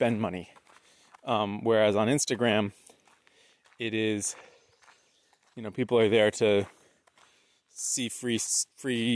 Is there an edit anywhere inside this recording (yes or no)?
no